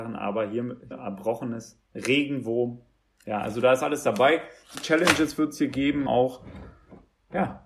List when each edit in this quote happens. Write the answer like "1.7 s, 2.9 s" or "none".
0.9 s, 4.7 s, 6.1 s